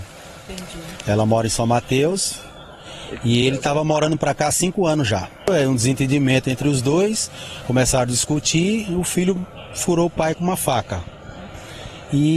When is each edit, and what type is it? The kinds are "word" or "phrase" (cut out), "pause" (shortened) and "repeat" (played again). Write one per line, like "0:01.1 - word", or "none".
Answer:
none